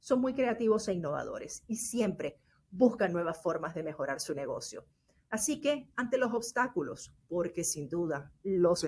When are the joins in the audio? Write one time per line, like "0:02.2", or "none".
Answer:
none